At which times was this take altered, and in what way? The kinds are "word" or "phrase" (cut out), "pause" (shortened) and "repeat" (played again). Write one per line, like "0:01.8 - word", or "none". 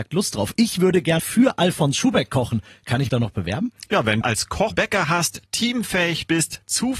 0:01.2 - word
0:03.1 - word
0:04.2 - phrase
0:04.7 - word